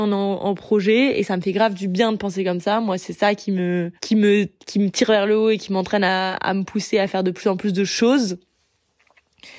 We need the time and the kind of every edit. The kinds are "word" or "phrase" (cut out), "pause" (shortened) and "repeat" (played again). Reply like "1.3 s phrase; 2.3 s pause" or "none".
4.0 s pause